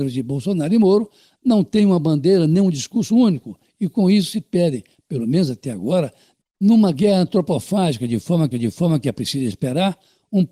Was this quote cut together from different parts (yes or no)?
yes